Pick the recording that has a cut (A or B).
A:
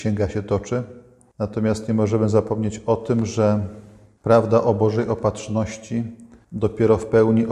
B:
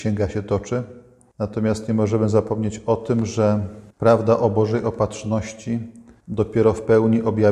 B